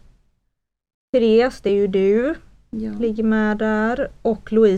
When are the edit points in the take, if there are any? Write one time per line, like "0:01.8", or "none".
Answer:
none

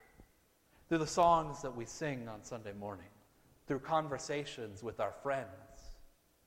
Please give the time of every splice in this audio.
0:03.3

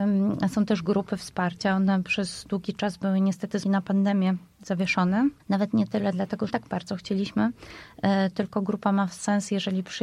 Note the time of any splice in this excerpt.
0:03.6
0:05.4
0:06.5

